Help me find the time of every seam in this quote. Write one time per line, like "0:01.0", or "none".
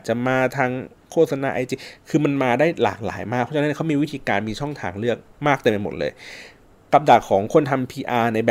0:05.2